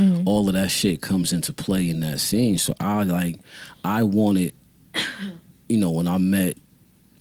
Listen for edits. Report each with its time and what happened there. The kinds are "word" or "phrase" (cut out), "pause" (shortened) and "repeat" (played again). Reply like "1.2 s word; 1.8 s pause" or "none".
none